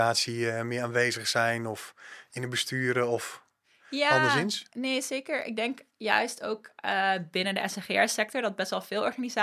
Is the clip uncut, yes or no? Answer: yes